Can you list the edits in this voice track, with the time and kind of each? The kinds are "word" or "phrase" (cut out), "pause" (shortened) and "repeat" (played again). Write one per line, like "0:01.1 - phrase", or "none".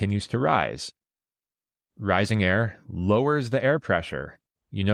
none